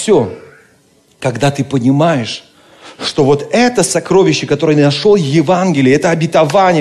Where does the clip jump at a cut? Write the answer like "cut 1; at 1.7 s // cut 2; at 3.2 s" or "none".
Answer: none